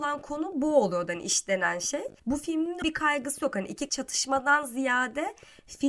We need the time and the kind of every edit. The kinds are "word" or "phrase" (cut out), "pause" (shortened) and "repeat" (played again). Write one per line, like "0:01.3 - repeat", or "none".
0:02.2 - pause
0:02.8 - word
0:03.9 - phrase